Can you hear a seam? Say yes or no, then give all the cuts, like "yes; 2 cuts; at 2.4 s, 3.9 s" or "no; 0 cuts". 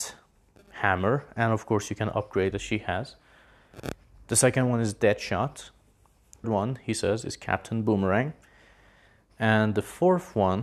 yes; 2 cuts; at 2.5 s, 6.4 s